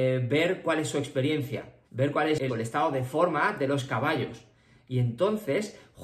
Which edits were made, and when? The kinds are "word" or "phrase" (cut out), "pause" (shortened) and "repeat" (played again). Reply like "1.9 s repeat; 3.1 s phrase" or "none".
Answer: 1.8 s pause; 2.5 s phrase